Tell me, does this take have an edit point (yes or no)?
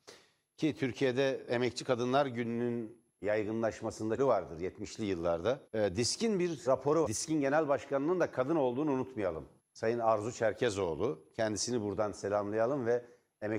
yes